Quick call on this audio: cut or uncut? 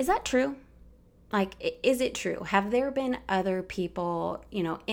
uncut